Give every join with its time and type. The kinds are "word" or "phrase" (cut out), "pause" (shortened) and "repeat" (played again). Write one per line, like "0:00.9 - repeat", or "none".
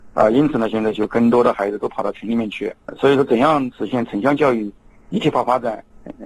none

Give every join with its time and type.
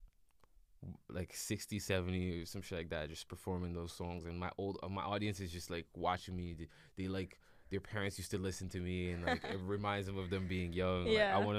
none

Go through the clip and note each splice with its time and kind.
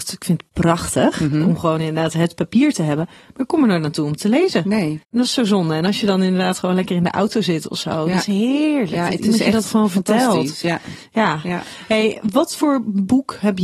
0:05.0 - pause

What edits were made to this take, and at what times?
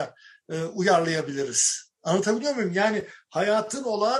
0:02.0 - pause

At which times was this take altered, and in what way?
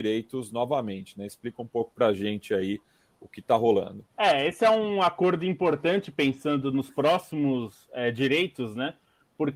0:04.1 - pause

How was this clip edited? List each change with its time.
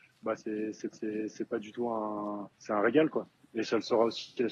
0:00.9 - repeat
0:02.5 - pause

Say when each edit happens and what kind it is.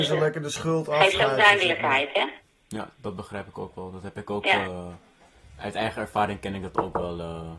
none

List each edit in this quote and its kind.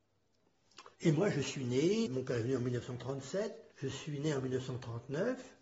0:00.9 - pause
0:02.1 - word
0:03.7 - pause

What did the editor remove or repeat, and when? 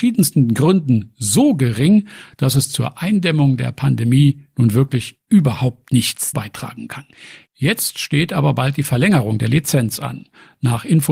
none

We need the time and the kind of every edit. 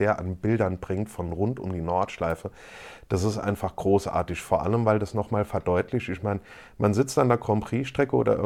none

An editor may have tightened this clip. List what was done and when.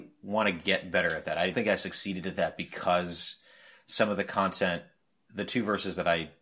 0:01.5 - word

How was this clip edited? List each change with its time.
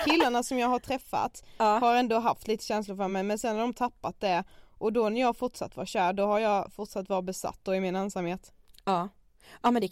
none

